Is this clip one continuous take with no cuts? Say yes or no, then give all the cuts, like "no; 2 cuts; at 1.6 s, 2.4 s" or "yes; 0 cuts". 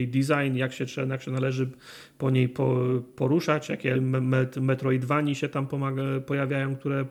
no; 1 cut; at 3.9 s